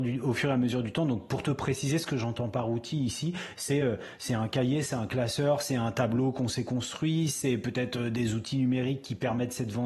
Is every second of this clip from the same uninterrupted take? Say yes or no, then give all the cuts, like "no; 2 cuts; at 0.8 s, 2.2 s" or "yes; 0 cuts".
yes; 0 cuts